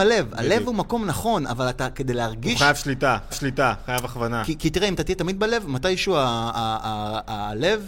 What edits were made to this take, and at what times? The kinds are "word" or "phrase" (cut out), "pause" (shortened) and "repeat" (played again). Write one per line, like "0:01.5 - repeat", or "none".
0:03.3 - repeat